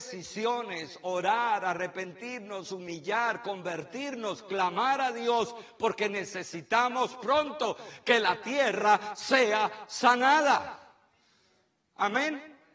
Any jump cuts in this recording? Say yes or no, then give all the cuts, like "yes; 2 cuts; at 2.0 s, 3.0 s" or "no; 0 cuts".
no; 0 cuts